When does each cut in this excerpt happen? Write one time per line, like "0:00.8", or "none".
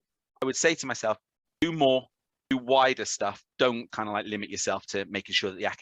0:03.9